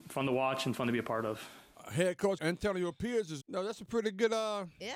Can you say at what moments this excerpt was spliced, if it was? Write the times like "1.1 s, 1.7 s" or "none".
2.4 s, 3.4 s